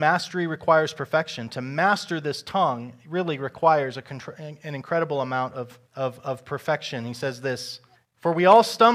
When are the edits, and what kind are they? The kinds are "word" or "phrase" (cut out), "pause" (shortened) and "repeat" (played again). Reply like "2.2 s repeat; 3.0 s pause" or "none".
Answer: 5.9 s pause; 7.9 s pause